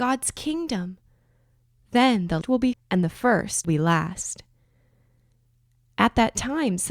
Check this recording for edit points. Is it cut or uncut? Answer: cut